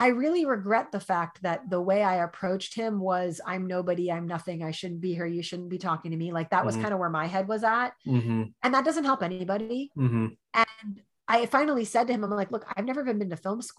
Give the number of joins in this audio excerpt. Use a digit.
0